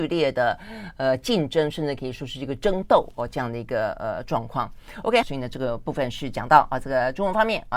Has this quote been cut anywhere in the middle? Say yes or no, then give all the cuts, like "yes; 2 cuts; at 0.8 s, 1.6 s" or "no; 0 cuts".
yes; 1 cut; at 5.2 s